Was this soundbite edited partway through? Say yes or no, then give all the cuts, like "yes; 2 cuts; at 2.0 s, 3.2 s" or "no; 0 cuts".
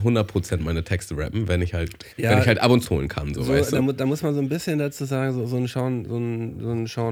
yes; 2 cuts; at 2.1 s, 2.8 s